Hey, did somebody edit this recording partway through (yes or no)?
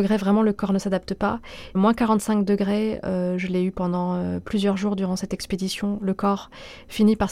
no